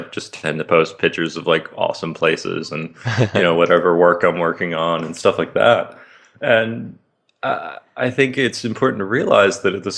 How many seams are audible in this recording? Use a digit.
0